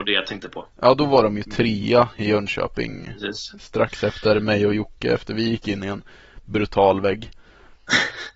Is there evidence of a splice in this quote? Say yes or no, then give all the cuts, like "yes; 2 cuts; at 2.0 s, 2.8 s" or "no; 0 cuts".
no; 0 cuts